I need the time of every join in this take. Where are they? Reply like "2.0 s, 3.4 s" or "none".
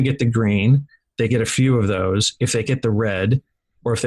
1.3 s, 2.7 s